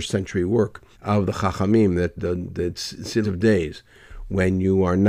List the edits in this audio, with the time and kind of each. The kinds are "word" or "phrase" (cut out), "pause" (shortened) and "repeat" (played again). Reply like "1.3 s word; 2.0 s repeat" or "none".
0.9 s pause; 2.2 s word; 3.2 s phrase